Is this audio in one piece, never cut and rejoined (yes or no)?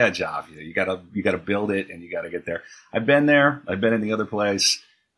yes